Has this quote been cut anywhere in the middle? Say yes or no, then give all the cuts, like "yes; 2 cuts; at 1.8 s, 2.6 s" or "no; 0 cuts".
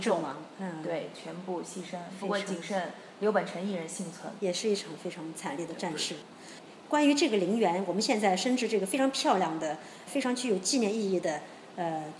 yes; 2 cuts; at 4.4 s, 10.1 s